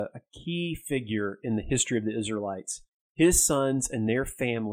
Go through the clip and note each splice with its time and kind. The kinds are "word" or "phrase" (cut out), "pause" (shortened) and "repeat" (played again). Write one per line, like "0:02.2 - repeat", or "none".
0:02.9 - pause